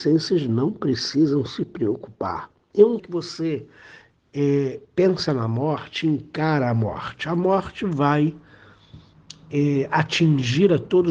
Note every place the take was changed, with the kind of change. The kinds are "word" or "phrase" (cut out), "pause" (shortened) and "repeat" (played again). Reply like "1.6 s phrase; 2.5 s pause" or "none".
3.0 s phrase

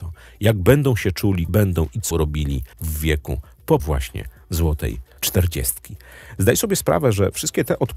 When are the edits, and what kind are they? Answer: 1.5 s word; 2.1 s word; 2.7 s pause; 3.8 s word; 5.2 s pause

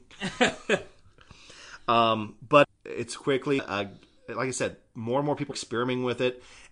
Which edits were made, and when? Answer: 2.6 s word; 3.6 s word; 5.5 s word

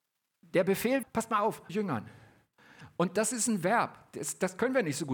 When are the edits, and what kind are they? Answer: 1.0 s word; 1.7 s phrase

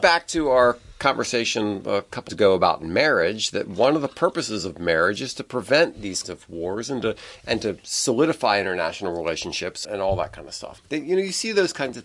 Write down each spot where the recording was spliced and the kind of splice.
2.3 s word; 6.2 s word; 9.8 s word; 10.8 s word

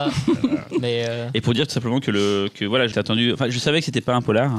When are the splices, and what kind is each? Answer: 2.9 s word

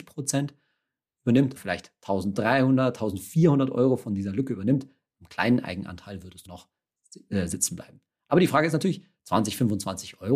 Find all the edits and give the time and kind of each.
1.6 s word; 6.5 s phrase

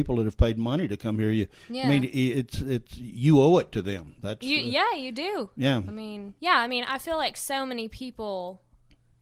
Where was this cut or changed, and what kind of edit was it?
6.4 s pause

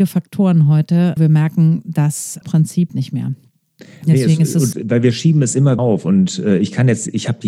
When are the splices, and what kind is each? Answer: 1.2 s word; 2.4 s word; 2.9 s word; 4.7 s word; 5.8 s word

